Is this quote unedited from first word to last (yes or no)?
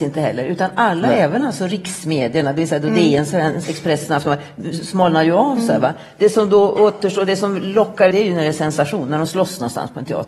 no